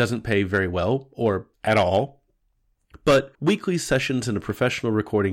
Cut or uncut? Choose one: cut